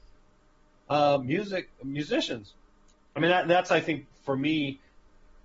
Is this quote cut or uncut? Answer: uncut